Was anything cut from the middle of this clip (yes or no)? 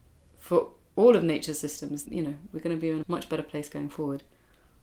yes